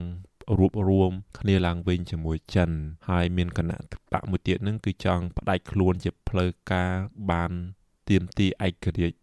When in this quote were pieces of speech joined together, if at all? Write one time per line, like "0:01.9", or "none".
0:01.3
0:03.0
0:07.9